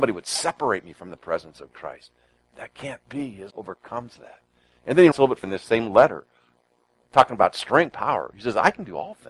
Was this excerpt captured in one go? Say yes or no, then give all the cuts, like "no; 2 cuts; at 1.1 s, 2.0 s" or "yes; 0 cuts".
no; 4 cuts; at 3.5 s, 5.1 s, 5.4 s, 7.9 s